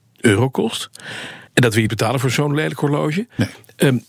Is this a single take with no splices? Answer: no; 2 cuts; at 1.5 s, 1.9 s

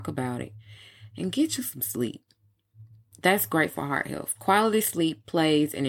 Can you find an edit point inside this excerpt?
no; 0 cuts

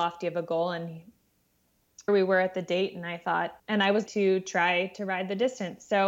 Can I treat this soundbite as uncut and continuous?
no; 3 cuts; at 2.1 s, 3.6 s, 4.1 s

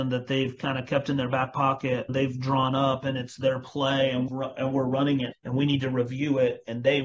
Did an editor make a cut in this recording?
yes; 3 cuts; at 2.1 s, 4.3 s, 5.3 s

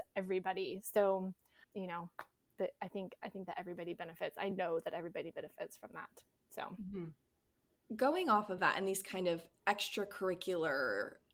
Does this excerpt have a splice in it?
no; 0 cuts

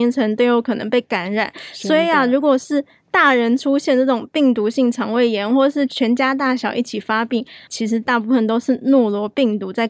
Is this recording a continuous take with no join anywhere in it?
no; 1 cut; at 7.7 s

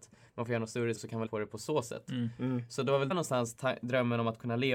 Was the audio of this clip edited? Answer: yes; 3 cuts; at 1.0 s, 1.3 s, 3.1 s

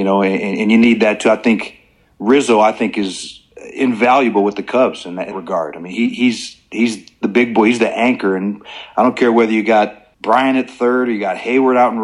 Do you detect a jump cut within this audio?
yes; 2 cuts; at 5.3 s, 10.1 s

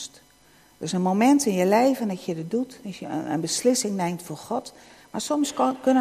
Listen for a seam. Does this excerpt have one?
no; 0 cuts

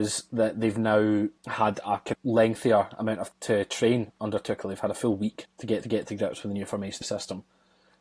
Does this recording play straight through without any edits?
no; 6 cuts; at 1.4 s, 2.1 s, 3.3 s, 5.5 s, 5.8 s, 7.0 s

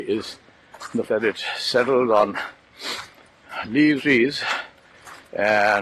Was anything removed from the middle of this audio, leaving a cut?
yes; 2 cuts; at 1.1 s, 4.0 s

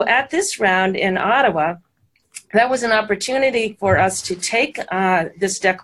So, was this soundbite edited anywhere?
no; 0 cuts

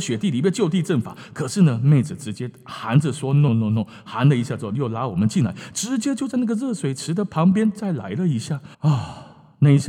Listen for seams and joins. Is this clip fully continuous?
no; 2 cuts; at 3.5 s, 8.7 s

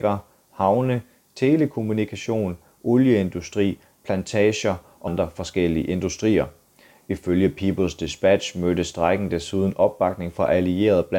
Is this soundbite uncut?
no; 1 cut; at 5.1 s

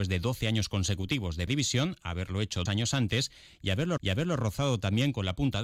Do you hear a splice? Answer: yes; 3 cuts; at 1.5 s, 2.7 s, 4.0 s

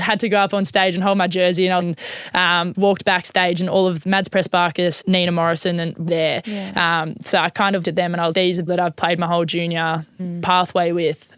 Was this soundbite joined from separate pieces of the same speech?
yes; 9 cuts; at 1.8 s, 2.7 s, 4.0 s, 5.0 s, 6.1 s, 7.8 s, 8.3 s, 8.7 s, 10.2 s

